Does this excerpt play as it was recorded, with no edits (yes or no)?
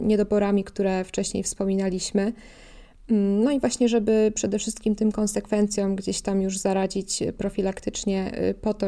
yes